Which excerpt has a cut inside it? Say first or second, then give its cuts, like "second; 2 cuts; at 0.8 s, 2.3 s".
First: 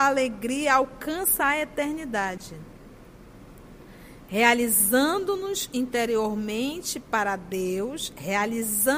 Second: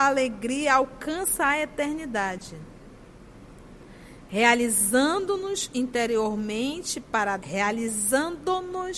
second; 1 cut; at 7.4 s